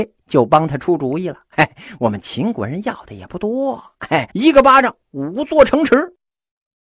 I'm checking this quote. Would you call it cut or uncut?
cut